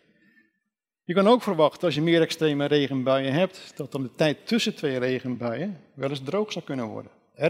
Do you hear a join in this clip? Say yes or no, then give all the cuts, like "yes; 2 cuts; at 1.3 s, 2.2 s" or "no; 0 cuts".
no; 0 cuts